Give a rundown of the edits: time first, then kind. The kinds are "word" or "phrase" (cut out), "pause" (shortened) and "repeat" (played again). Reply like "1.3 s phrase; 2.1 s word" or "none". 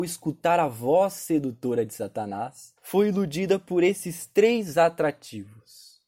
2.8 s pause